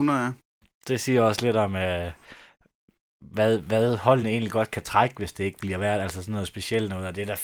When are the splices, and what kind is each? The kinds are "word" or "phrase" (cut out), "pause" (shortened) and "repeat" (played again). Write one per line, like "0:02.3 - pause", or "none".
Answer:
none